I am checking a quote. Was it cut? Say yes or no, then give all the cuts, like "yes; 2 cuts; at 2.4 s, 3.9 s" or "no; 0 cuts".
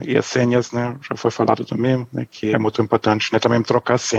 yes; 1 cut; at 2.5 s